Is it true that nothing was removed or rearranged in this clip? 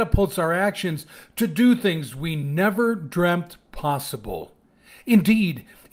yes; 0 cuts

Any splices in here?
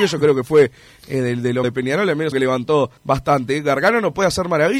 yes; 3 cuts; at 1.6 s, 2.3 s, 3.0 s

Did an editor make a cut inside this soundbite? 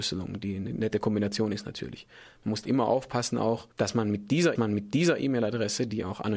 yes; 3 cuts; at 2.6 s, 3.7 s, 4.6 s

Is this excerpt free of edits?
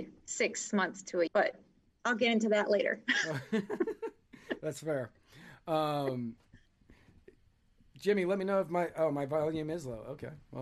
no; 1 cut; at 1.3 s

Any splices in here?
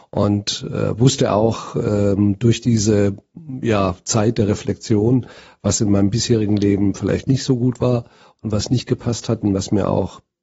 no; 0 cuts

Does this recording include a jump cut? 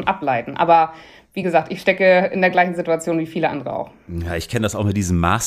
no; 0 cuts

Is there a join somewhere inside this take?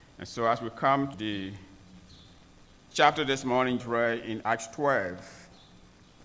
yes; 4 cuts; at 1.1 s, 2.9 s, 3.8 s, 4.4 s

